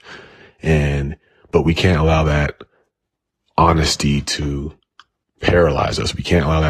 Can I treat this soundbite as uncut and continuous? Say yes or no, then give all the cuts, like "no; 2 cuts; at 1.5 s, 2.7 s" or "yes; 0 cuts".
yes; 0 cuts